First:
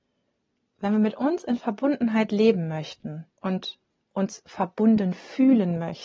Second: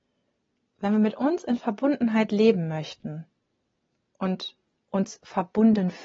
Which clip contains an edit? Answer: first; 1 cut; at 3.3 s

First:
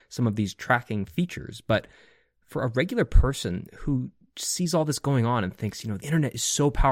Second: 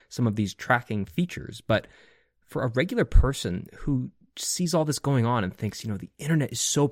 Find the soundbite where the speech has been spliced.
first; 1 cut; at 6.0 s

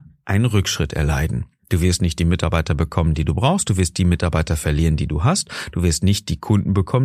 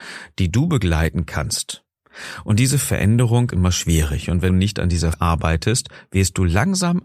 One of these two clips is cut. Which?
second; 3 cuts; at 3.5 s, 4.5 s, 5.1 s

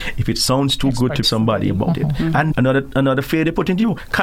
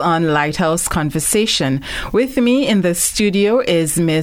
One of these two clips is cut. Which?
first; 2 cuts; at 1.2 s, 2.5 s

